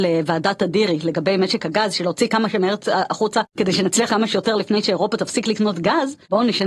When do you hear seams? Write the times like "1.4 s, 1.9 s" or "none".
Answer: 2.8 s, 4.1 s